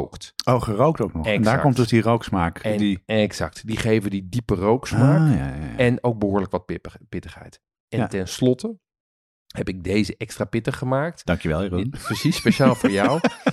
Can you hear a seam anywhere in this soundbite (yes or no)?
no